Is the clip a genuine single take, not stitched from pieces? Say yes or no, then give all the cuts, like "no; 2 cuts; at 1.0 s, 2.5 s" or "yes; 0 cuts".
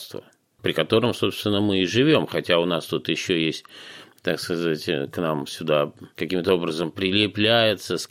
yes; 0 cuts